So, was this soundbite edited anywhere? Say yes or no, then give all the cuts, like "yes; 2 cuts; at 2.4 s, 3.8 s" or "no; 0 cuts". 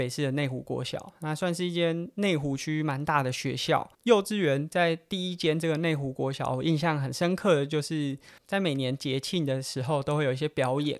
yes; 2 cuts; at 3.9 s, 8.4 s